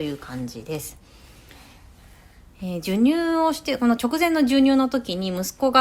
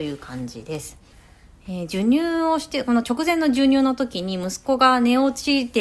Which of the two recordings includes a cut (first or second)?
second